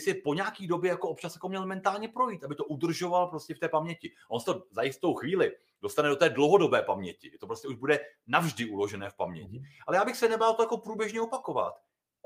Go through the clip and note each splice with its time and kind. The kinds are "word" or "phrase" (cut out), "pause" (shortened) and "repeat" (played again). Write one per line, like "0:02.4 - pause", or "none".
none